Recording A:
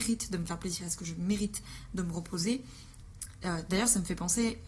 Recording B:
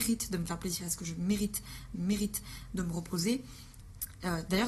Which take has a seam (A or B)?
B